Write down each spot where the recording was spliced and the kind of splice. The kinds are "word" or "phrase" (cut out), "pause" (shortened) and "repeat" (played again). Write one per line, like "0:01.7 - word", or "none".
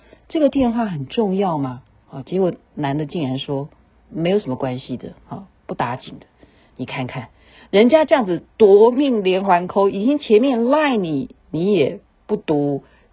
none